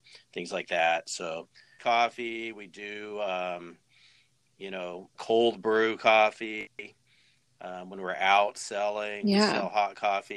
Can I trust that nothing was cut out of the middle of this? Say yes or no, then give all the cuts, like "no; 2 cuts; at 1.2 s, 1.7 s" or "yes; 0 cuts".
no; 2 cuts; at 1.8 s, 5.1 s